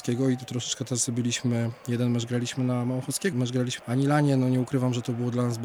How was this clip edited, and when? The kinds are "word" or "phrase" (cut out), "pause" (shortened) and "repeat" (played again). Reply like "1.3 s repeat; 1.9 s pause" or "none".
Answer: 3.3 s word; 3.8 s word